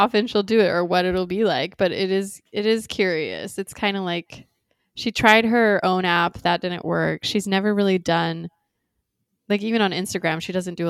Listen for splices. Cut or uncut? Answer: uncut